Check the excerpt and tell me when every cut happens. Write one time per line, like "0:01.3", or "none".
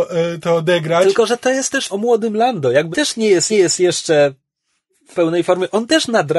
0:01.9
0:02.9
0:03.5
0:05.1